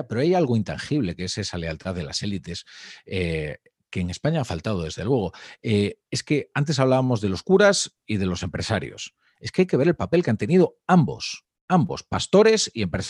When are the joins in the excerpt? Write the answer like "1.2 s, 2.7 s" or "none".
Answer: none